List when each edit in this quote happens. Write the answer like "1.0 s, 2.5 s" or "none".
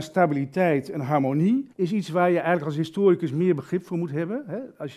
1.7 s